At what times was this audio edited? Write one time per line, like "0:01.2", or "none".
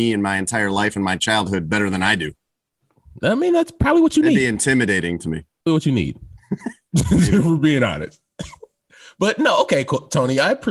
0:05.7